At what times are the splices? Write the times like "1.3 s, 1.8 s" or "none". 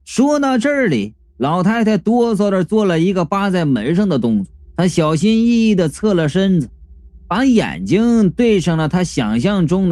4.7 s